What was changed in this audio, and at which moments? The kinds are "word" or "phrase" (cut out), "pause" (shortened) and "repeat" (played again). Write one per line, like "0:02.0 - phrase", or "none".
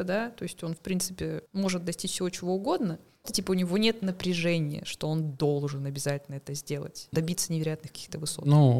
0:01.5 - pause
0:03.2 - word
0:07.1 - word